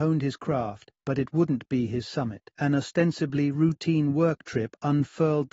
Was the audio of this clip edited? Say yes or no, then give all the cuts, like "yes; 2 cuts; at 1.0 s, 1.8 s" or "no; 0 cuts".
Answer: yes; 2 cuts; at 1.0 s, 2.5 s